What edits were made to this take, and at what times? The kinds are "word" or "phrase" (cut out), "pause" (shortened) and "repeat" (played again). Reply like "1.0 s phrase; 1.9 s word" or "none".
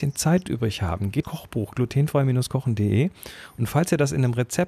1.2 s phrase